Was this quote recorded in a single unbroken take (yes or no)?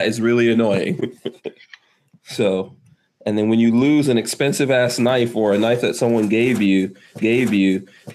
no